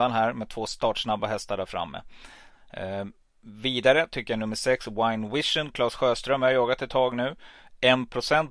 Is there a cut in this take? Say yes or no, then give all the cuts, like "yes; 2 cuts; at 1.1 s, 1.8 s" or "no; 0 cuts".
no; 0 cuts